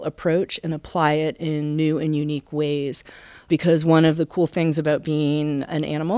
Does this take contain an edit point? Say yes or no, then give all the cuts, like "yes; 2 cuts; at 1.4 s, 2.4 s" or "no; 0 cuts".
no; 0 cuts